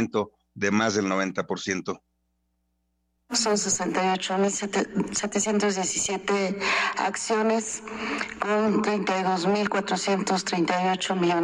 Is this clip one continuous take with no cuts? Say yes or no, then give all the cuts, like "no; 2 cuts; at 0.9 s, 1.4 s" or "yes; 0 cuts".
yes; 0 cuts